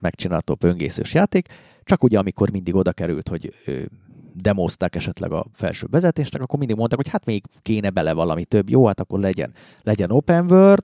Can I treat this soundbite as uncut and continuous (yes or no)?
yes